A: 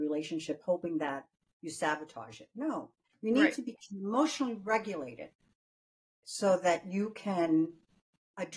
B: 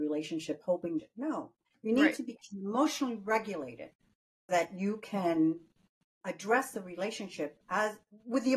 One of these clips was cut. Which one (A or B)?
B